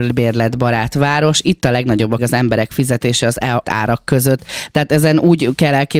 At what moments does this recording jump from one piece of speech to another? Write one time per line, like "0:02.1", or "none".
0:02.2
0:03.2
0:03.6